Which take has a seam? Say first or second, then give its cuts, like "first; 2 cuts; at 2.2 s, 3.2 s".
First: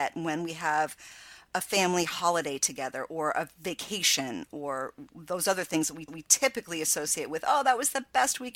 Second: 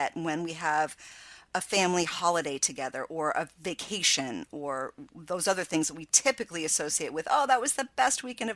first; 1 cut; at 6.1 s